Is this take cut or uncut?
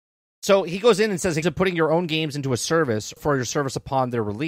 cut